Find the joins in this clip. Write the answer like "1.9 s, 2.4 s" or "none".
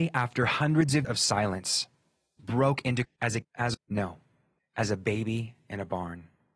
1.0 s, 2.4 s, 3.0 s, 3.4 s, 3.7 s

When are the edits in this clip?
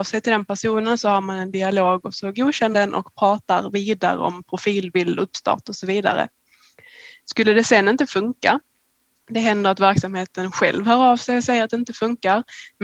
2.7 s, 5.2 s

